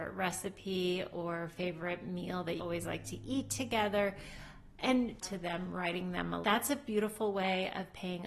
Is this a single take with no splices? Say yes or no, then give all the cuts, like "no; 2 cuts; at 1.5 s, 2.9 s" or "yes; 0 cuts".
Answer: no; 3 cuts; at 2.6 s, 5.2 s, 6.4 s